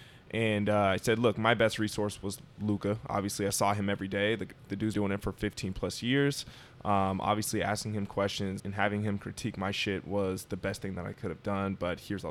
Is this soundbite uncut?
no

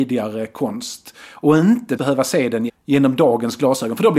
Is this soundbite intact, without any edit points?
no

